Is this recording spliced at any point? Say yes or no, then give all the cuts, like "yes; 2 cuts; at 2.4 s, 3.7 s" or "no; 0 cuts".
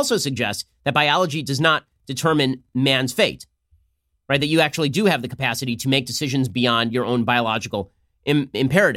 no; 0 cuts